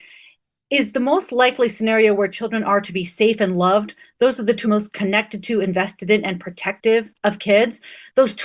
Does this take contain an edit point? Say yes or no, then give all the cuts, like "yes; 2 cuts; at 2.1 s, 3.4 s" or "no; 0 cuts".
yes; 1 cut; at 4.6 s